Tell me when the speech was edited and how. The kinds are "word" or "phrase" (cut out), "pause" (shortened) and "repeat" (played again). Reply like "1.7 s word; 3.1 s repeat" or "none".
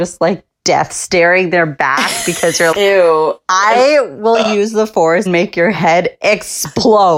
2.7 s word; 5.3 s word